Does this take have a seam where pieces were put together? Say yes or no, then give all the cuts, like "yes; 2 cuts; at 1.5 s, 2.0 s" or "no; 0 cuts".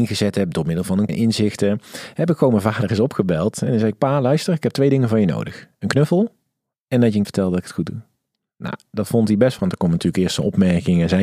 yes; 3 cuts; at 1.1 s, 7.2 s, 9.6 s